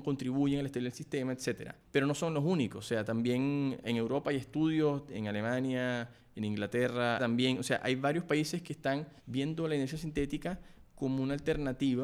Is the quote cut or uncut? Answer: cut